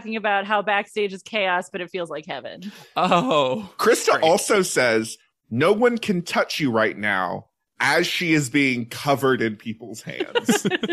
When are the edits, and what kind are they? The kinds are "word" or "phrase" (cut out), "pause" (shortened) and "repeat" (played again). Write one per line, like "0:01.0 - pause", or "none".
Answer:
none